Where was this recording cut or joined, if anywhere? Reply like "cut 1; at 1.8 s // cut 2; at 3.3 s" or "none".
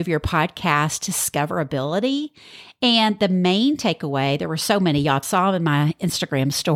cut 1; at 5.2 s